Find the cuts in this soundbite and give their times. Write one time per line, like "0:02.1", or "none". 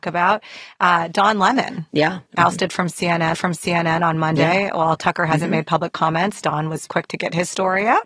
0:02.3
0:03.3
0:06.9